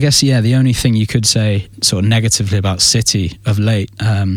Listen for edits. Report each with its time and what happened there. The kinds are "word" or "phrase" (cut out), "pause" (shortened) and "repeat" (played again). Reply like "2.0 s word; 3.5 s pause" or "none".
1.7 s pause